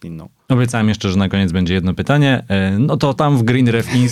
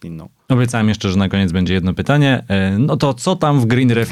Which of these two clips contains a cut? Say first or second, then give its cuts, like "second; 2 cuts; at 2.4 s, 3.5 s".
first; 1 cut; at 3.2 s